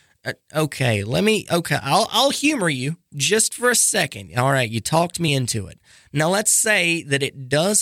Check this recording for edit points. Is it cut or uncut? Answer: uncut